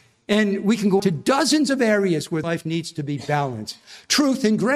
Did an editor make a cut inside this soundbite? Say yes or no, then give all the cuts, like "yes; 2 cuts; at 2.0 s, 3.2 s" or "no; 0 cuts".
yes; 2 cuts; at 1.0 s, 2.4 s